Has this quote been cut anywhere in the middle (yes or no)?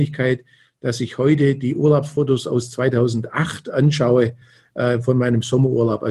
no